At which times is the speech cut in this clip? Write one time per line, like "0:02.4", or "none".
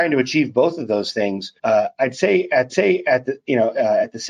0:01.6
0:02.7